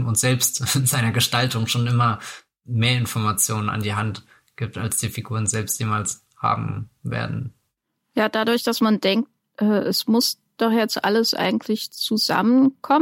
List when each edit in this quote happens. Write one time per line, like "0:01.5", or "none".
none